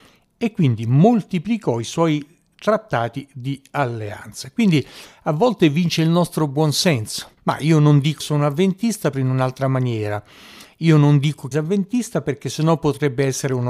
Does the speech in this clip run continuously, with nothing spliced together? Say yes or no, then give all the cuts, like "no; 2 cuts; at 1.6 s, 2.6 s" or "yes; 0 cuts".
no; 4 cuts; at 7.4 s, 8.2 s, 9.1 s, 11.5 s